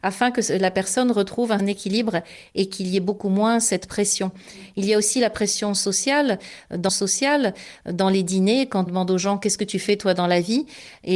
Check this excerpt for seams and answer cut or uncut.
cut